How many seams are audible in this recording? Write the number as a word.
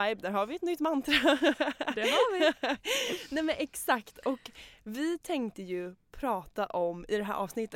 zero